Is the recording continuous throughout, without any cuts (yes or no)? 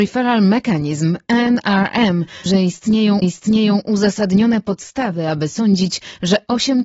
no